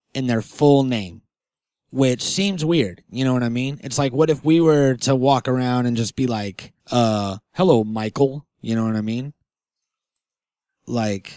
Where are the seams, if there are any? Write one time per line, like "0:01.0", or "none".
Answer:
0:01.4
0:06.8

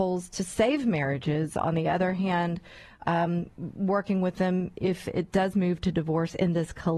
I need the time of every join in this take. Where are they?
none

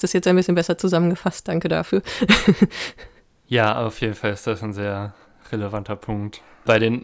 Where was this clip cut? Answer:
none

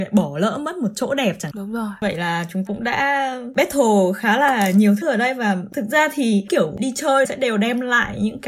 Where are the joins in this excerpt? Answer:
0:01.5
0:02.7
0:05.0
0:06.5
0:07.2

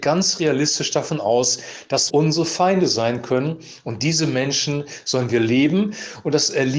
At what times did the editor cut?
0:02.1

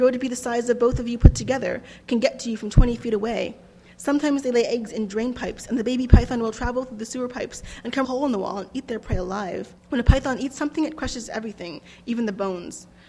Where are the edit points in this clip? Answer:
0:08.0
0:09.8

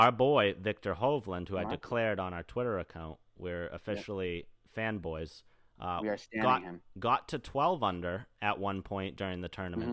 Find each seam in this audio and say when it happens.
none

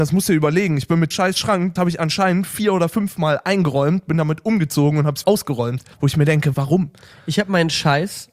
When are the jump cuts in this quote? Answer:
0:01.1
0:01.8
0:05.2
0:05.9
0:06.5

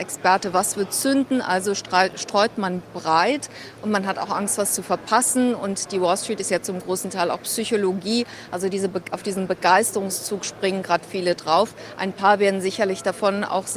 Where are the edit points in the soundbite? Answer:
none

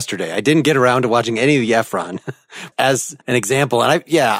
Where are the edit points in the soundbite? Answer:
0:03.2

